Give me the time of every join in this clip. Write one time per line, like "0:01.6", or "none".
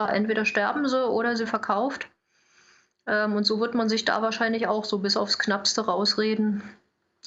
0:01.4